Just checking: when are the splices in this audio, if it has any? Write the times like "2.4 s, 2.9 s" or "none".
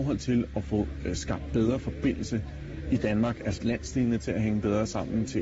3.6 s

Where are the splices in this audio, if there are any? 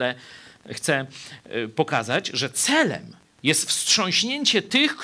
3.2 s

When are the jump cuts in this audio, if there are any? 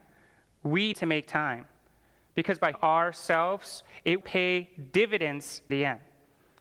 0.9 s, 2.7 s, 4.2 s, 5.7 s

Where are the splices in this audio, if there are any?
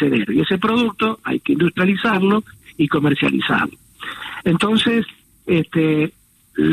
none

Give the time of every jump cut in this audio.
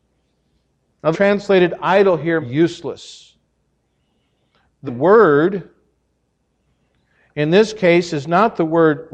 1.1 s, 2.4 s, 4.9 s

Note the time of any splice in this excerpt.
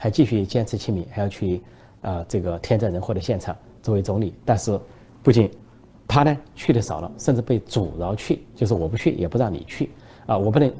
none

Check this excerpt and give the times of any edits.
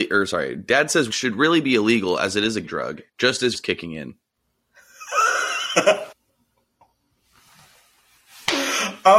1.1 s, 2.6 s, 3.1 s, 3.5 s, 6.1 s

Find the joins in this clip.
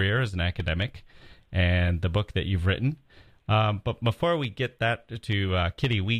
none

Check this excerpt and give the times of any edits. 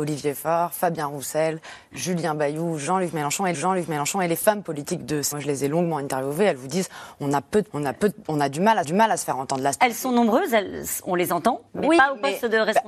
3.5 s, 5.3 s, 7.7 s, 8.8 s, 11.7 s

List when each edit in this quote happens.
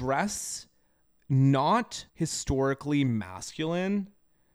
2.1 s

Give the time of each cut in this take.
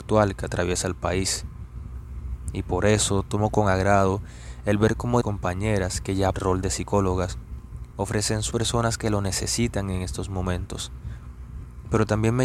5.2 s, 6.3 s, 8.5 s

